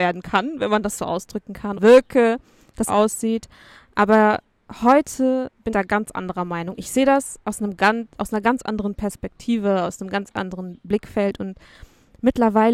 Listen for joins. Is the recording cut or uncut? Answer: cut